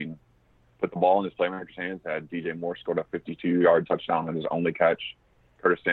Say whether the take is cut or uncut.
uncut